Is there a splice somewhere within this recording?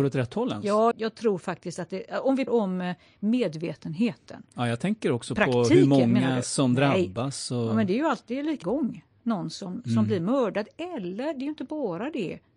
yes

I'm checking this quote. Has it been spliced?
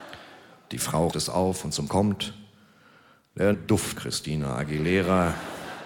yes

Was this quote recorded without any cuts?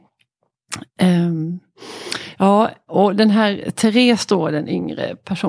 yes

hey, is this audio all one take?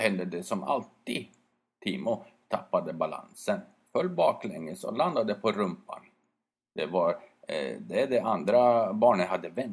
yes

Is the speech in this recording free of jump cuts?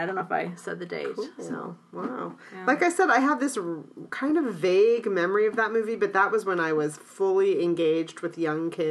yes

